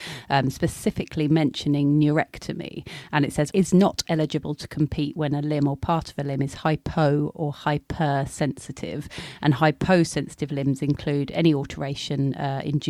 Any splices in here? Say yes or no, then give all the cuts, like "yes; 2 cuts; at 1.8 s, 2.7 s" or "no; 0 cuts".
yes; 1 cut; at 3.5 s